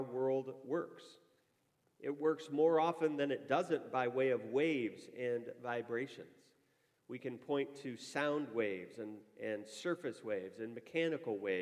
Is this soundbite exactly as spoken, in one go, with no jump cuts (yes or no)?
yes